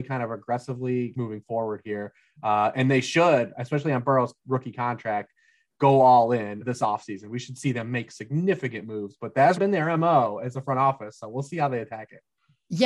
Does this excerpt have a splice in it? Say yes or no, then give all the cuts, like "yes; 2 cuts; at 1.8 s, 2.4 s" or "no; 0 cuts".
yes; 3 cuts; at 1.1 s, 6.6 s, 9.6 s